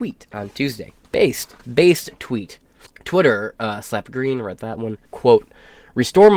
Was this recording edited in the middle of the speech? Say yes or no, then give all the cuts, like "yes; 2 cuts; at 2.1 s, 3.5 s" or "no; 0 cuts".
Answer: yes; 2 cuts; at 2.9 s, 5.1 s